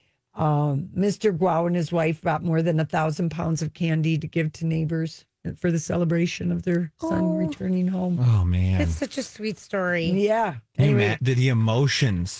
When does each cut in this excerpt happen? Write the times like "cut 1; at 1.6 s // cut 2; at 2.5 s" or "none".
none